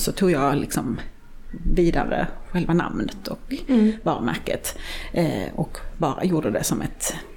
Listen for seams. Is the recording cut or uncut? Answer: uncut